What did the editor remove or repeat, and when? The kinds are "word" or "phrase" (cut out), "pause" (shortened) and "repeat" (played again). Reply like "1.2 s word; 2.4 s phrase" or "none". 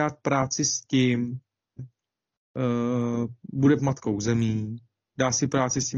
1.8 s word; 3.8 s word

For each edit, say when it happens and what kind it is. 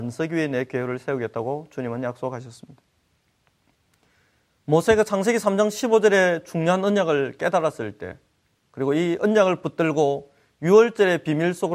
none

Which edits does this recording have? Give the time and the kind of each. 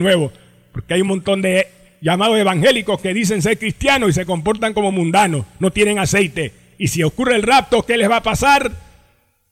none

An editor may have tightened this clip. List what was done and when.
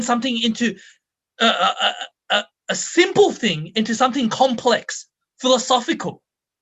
none

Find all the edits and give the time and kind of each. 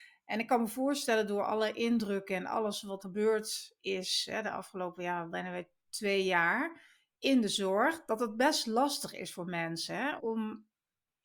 3.0 s word; 10.2 s word

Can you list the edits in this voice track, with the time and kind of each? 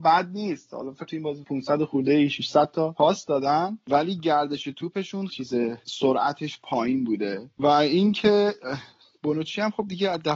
1.1 s word; 1.4 s word; 5.3 s word; 5.8 s word

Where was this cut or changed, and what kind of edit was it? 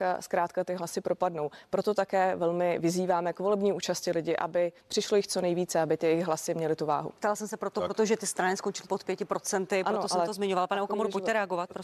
8.9 s word

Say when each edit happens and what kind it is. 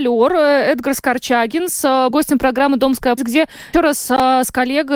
2.1 s word; 3.2 s word; 3.7 s word

